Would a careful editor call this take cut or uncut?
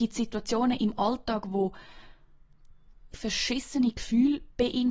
cut